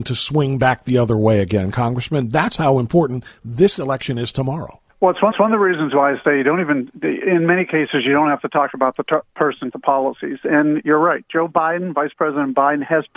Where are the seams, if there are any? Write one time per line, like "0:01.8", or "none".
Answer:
0:04.9
0:05.3
0:09.7